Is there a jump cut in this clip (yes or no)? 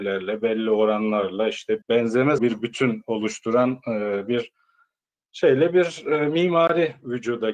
yes